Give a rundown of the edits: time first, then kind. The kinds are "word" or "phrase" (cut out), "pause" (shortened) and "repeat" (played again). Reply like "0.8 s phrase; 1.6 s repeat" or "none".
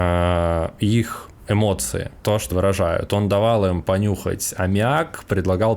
2.2 s pause; 2.5 s word